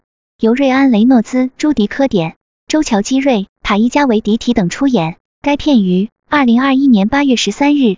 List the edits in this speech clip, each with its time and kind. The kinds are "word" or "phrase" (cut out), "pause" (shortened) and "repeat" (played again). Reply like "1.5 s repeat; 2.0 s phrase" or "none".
2.4 s pause; 6.2 s pause